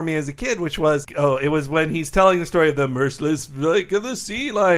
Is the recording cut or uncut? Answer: uncut